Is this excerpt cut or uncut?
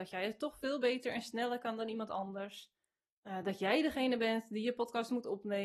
uncut